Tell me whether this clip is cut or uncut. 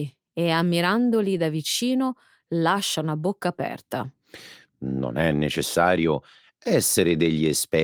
uncut